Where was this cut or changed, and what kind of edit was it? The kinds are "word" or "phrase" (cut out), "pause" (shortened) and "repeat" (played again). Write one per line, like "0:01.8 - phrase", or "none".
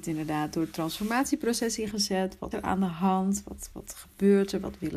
0:01.9 - word
0:02.5 - word
0:03.7 - word